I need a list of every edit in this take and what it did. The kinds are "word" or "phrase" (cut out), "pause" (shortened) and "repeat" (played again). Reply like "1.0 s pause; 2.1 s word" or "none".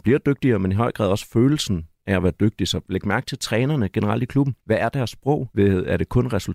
4.6 s pause; 5.5 s pause